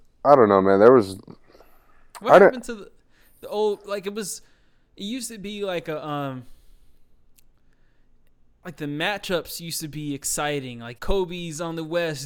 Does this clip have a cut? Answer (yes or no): yes